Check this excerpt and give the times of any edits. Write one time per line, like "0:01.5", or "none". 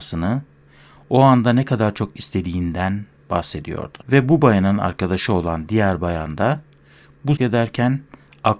0:04.0
0:07.4